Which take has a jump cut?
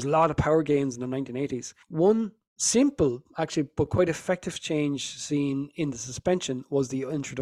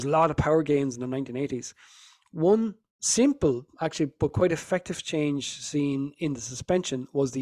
first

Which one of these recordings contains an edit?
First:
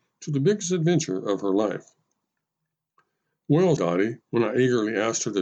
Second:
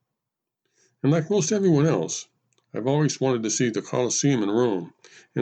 first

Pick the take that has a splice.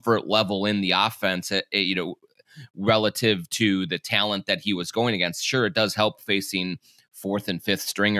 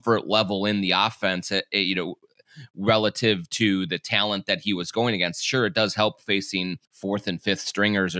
second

